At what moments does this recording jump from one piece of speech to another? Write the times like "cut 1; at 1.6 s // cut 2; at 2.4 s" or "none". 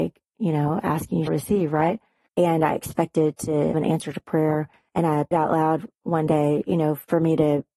cut 1; at 1.3 s // cut 2; at 3.7 s // cut 3; at 5.3 s